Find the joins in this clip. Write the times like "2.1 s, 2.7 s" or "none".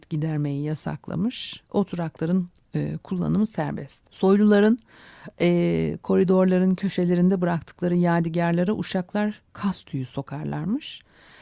1.7 s, 4.1 s, 9.5 s